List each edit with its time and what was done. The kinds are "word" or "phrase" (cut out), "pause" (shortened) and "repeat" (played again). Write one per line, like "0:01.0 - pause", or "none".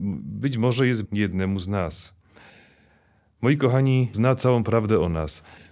0:01.0 - word
0:04.1 - word